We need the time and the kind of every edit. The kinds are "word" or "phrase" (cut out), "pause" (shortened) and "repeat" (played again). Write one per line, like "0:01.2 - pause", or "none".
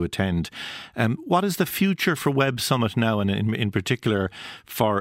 none